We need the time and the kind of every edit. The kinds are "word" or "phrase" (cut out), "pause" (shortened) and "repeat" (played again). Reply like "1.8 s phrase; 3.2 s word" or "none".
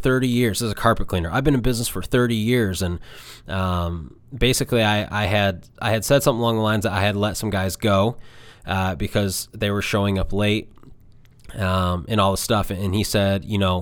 none